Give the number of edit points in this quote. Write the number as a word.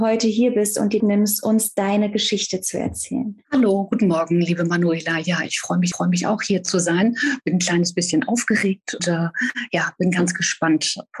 four